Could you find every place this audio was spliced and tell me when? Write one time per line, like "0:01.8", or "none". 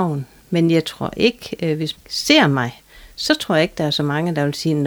0:01.9